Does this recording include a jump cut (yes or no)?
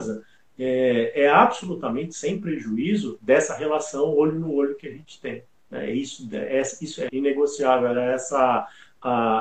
yes